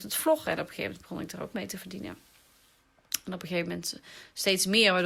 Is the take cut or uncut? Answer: cut